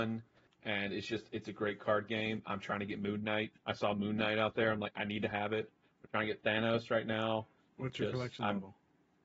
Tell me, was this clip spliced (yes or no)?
no